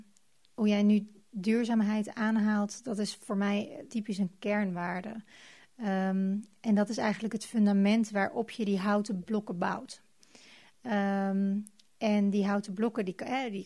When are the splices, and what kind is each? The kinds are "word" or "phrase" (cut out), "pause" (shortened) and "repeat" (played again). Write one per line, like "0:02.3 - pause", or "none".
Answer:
0:03.9 - word

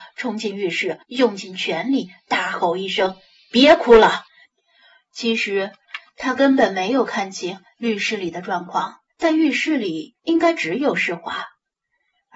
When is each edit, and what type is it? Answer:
0:01.0 - pause
0:04.3 - pause
0:09.1 - pause
0:10.2 - pause

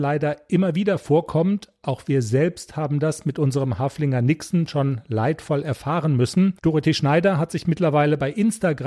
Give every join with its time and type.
0:06.6 - pause

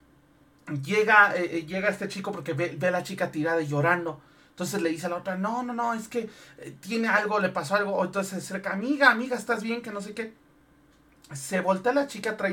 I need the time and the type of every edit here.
none

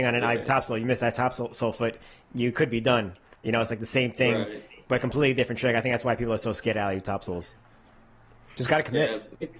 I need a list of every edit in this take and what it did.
none

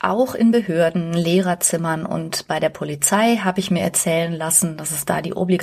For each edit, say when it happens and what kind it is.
none

